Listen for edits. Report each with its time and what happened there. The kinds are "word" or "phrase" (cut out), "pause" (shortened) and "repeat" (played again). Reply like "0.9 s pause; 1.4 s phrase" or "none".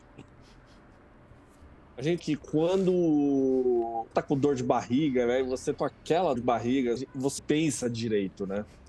2.2 s word; 4.1 s word; 5.7 s word; 6.4 s word; 7.0 s word; 7.4 s word